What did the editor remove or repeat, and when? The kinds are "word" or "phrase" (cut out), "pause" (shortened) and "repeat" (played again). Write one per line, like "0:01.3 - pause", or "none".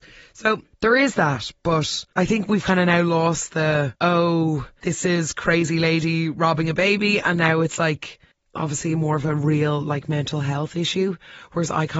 none